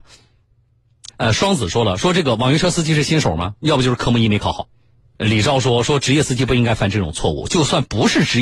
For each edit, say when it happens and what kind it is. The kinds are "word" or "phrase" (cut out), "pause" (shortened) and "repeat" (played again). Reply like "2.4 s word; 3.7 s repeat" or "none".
1.1 s pause; 5.2 s phrase